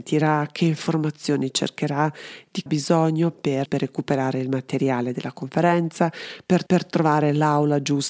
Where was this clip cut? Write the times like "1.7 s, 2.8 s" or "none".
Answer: 2.7 s, 3.6 s, 6.7 s

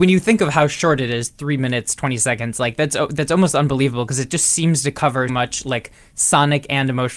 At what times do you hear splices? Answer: 5.3 s

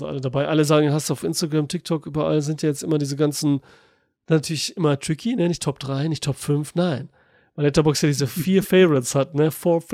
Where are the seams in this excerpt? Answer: none

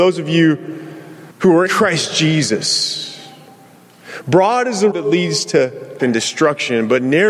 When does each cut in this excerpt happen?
1.3 s, 1.7 s, 4.9 s, 6.0 s

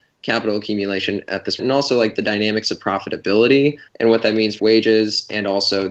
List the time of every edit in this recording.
1.6 s, 3.9 s, 4.6 s

